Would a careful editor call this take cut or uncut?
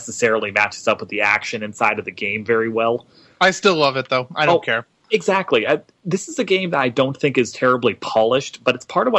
uncut